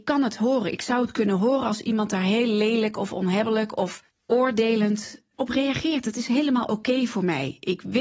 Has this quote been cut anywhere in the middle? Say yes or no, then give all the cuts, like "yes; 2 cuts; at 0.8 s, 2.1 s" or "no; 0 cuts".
no; 0 cuts